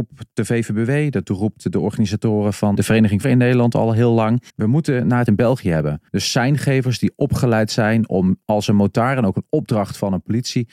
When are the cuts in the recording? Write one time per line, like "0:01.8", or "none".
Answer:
0:02.7
0:03.2
0:04.5
0:05.3
0:06.1